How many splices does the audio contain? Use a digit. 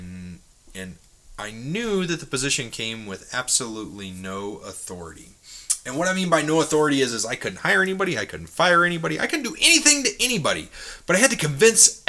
0